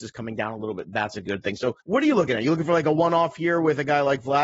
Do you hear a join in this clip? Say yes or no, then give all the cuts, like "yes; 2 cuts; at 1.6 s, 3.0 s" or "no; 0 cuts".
yes; 1 cut; at 1.8 s